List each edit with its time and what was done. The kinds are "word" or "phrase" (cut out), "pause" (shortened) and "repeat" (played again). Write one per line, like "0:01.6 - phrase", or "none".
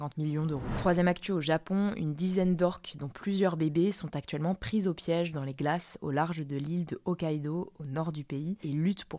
none